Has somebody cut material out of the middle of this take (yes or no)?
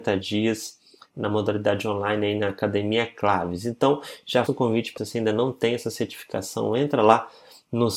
yes